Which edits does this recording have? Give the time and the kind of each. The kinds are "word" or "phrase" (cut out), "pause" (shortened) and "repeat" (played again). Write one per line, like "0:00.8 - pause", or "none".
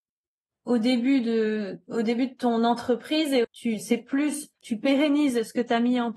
0:03.4 - word
0:04.6 - pause